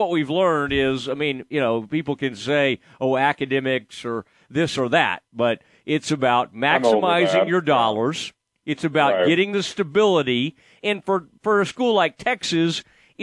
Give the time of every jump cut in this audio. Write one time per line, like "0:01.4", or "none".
none